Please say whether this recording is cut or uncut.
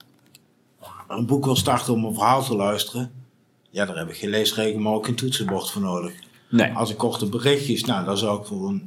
uncut